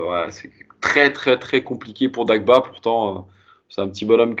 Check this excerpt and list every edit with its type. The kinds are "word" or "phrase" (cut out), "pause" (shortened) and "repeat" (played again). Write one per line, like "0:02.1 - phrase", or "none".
none